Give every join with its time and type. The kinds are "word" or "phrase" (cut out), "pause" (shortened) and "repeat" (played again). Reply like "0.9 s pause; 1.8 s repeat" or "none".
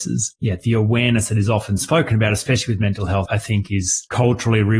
3.3 s word